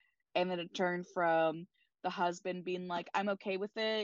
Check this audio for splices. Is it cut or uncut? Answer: uncut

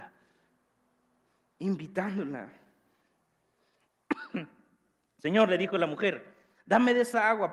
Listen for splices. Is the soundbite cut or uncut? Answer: uncut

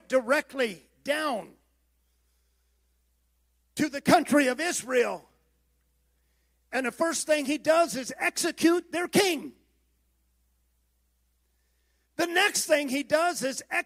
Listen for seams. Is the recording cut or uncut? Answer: uncut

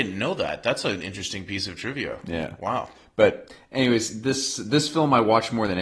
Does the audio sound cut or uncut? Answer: uncut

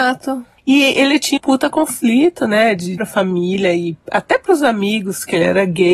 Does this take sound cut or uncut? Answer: cut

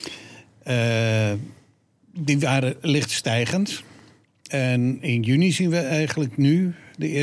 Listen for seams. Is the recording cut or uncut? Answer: uncut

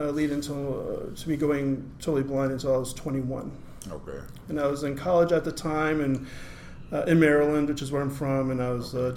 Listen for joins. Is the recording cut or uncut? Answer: uncut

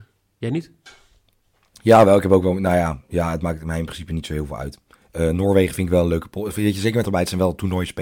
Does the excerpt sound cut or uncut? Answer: cut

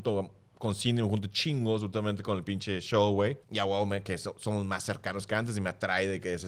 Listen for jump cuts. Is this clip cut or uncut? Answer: cut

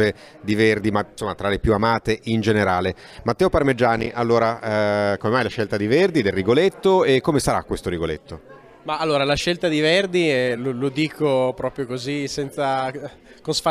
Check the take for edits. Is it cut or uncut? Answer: uncut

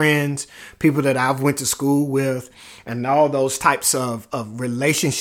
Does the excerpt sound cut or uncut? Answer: uncut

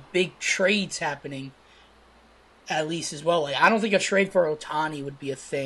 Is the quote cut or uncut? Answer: uncut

